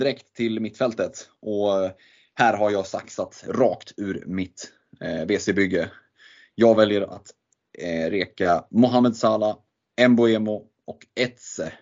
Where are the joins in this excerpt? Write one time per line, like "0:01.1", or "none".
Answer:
none